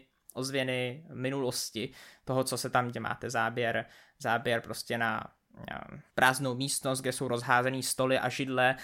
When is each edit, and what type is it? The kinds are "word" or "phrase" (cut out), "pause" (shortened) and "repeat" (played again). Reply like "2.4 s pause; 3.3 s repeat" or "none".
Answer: 2.9 s phrase; 6.1 s pause

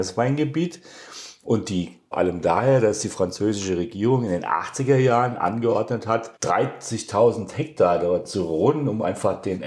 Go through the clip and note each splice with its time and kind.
2.1 s phrase; 6.4 s pause

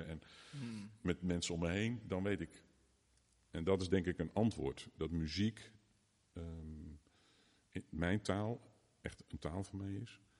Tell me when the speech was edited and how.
none

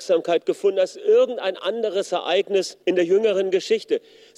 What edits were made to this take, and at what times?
2.8 s pause

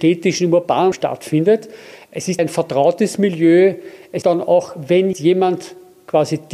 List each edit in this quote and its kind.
0.9 s word; 2.4 s word; 4.2 s word; 5.1 s word

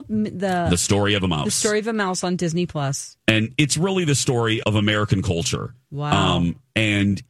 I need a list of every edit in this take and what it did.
3.2 s pause; 4.6 s word

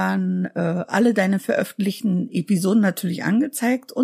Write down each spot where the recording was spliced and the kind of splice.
none

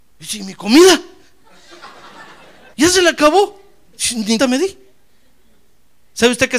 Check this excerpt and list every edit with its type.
2.7 s pause; 4.4 s word

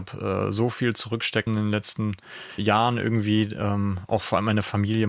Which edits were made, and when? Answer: 1.5 s word; 2.6 s word

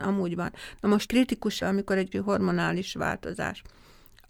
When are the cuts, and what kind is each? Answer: 1.1 s word; 1.6 s word; 2.1 s word

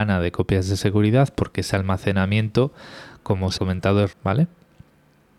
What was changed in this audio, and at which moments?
3.6 s word; 4.1 s word

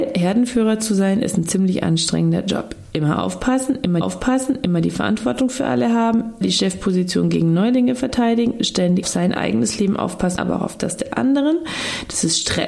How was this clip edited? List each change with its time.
4.0 s repeat; 6.4 s word; 9.0 s word; 10.4 s word

